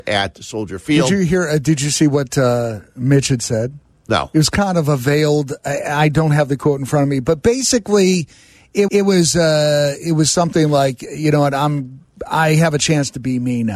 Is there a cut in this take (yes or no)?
yes